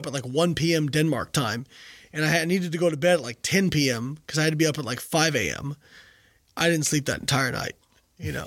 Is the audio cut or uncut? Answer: uncut